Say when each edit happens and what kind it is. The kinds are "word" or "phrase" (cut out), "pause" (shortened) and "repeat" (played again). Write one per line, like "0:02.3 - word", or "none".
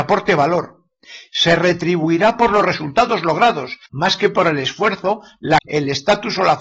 0:03.9 - pause
0:05.6 - word